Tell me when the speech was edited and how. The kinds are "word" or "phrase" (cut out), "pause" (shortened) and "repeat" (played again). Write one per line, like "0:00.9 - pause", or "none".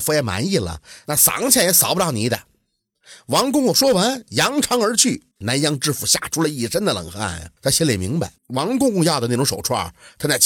0:05.3 - pause
0:07.6 - pause
0:08.4 - pause